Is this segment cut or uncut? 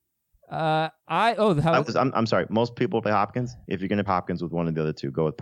cut